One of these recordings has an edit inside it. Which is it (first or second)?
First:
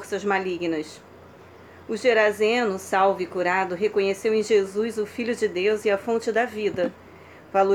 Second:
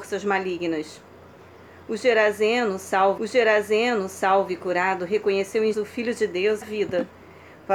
second